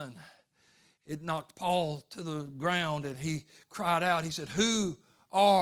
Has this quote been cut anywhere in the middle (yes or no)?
no